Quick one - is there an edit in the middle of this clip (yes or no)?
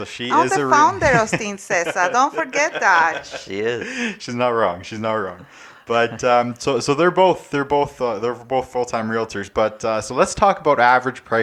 no